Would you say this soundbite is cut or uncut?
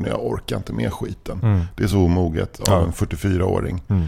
uncut